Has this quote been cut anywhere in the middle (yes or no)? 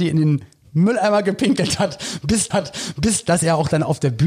yes